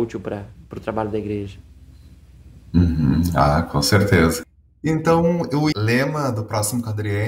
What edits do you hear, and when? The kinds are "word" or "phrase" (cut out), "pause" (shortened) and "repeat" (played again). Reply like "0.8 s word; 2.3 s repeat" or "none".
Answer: 5.7 s word